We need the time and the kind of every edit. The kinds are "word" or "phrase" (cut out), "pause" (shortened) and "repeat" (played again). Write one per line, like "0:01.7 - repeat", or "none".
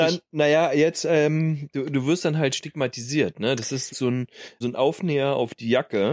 0:03.9 - phrase
0:04.6 - word